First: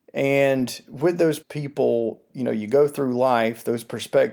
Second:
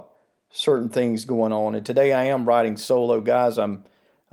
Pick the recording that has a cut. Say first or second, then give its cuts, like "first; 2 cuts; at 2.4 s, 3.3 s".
first; 1 cut; at 1.4 s